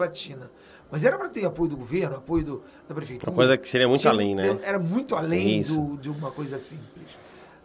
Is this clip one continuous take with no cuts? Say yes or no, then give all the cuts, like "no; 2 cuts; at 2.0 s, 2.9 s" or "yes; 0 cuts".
yes; 0 cuts